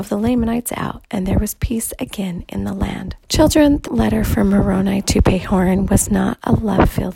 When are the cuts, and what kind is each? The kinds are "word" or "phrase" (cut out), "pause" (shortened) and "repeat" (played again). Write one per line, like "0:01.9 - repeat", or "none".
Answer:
0:03.2 - pause
0:03.9 - word